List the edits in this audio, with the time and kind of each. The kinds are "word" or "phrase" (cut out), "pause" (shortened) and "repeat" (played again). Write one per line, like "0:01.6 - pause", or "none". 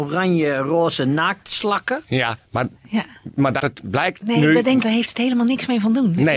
0:02.4 - pause
0:03.6 - word
0:04.8 - phrase